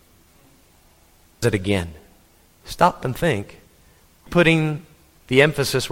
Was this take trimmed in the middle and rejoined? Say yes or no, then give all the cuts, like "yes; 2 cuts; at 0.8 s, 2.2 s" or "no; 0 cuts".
yes; 3 cuts; at 1.4 s, 3.0 s, 4.3 s